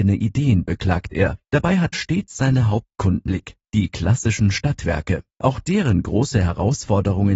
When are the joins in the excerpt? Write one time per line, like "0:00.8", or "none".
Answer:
0:01.4
0:01.9
0:03.3
0:03.7
0:05.3